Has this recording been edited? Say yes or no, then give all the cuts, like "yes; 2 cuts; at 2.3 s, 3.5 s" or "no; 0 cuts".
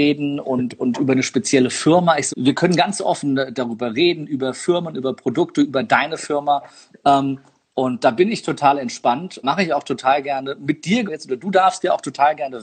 yes; 3 cuts; at 2.3 s, 9.4 s, 11.1 s